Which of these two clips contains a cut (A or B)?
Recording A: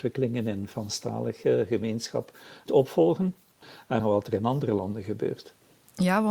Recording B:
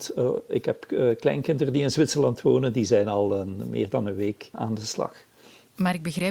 A